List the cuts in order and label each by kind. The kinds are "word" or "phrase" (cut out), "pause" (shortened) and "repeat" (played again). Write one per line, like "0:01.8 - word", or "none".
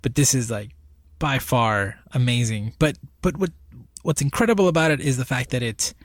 0:03.9 - pause